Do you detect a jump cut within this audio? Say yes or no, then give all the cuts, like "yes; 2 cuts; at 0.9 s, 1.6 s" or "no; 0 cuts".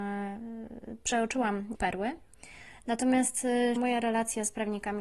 yes; 2 cuts; at 1.7 s, 3.8 s